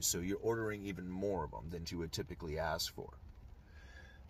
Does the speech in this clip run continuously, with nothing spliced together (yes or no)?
no